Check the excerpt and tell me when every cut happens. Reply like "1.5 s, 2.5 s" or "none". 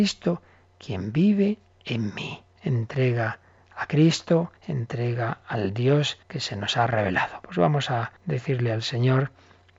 2.5 s, 4.6 s, 6.2 s, 8.2 s